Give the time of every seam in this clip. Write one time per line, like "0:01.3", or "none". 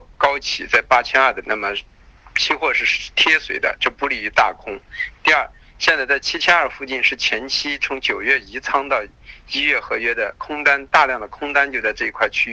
0:01.4